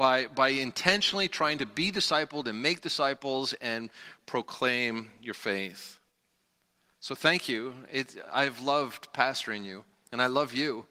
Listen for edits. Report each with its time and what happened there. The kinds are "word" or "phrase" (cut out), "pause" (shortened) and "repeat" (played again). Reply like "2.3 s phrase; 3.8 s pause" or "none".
none